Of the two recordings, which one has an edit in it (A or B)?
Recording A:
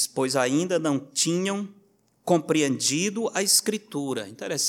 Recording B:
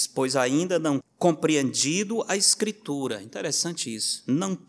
B